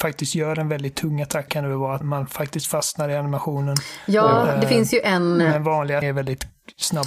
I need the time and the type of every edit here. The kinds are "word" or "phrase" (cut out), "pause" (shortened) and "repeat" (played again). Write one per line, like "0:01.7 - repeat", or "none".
0:01.5 - word
0:02.0 - word
0:06.0 - word